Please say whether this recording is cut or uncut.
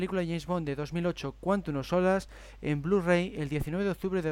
uncut